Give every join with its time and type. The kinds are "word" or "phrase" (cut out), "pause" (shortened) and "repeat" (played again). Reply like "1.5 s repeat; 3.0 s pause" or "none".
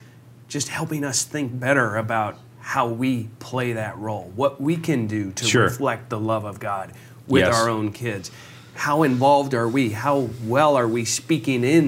none